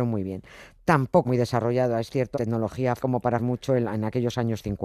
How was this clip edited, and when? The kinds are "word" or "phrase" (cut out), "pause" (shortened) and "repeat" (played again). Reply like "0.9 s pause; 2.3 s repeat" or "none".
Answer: 1.2 s word; 2.3 s word; 3.0 s word; 3.4 s word